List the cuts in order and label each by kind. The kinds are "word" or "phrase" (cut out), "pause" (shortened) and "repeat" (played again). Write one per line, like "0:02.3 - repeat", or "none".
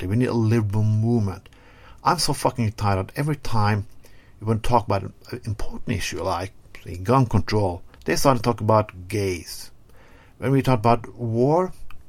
0:08.0 - pause